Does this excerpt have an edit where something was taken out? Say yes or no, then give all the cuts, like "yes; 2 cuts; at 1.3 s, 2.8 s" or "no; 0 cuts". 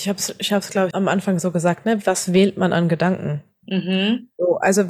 yes; 1 cut; at 0.9 s